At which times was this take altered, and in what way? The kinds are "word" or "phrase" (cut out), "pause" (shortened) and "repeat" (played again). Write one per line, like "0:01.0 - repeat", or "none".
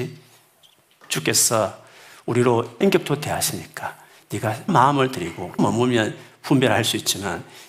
0:02.8 - word
0:04.7 - word
0:05.6 - word